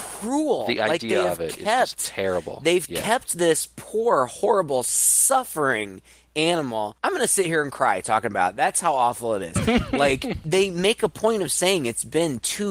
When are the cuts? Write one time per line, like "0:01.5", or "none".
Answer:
none